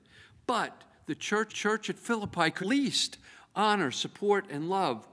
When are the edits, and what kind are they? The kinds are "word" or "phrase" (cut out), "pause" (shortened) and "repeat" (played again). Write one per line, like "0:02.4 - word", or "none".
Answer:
0:01.5 - repeat
0:02.6 - word